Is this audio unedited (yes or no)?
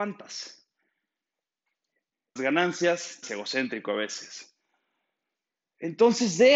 no